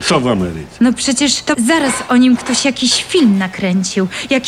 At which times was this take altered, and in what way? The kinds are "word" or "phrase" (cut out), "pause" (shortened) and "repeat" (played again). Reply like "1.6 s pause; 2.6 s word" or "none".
1.5 s word